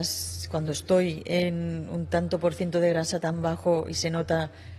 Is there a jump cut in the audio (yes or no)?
no